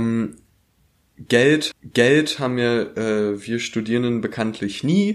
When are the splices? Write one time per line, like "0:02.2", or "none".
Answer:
0:01.7